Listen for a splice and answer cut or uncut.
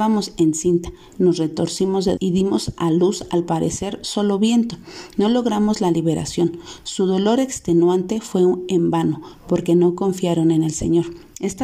cut